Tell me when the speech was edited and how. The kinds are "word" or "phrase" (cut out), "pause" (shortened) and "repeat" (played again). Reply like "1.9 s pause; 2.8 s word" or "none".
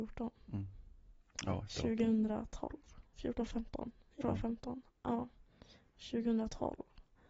3.1 s pause; 4.2 s word